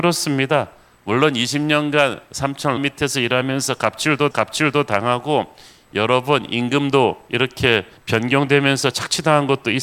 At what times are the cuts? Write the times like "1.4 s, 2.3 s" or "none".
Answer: 2.8 s, 4.3 s, 8.0 s